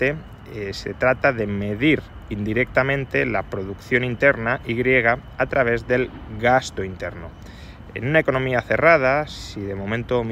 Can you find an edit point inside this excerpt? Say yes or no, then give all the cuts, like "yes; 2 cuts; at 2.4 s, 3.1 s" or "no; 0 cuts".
no; 0 cuts